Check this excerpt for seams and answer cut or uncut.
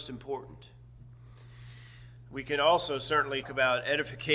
cut